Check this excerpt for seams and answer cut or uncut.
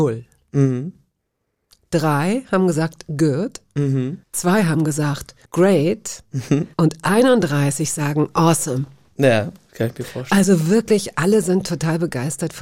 cut